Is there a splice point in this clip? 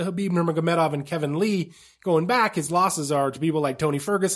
no; 0 cuts

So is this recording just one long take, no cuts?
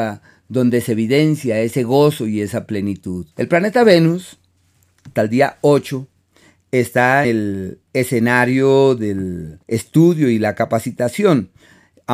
no; 4 cuts; at 3.3 s, 5.2 s, 7.2 s, 9.6 s

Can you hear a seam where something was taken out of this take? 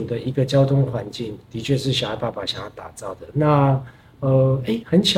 no; 0 cuts

